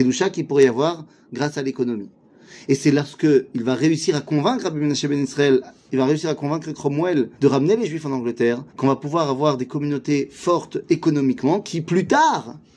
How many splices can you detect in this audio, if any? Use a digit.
2